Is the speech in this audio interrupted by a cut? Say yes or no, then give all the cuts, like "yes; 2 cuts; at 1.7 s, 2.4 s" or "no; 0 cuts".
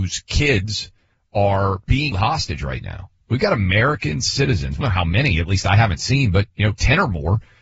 yes; 3 cuts; at 2.1 s, 4.8 s, 6.5 s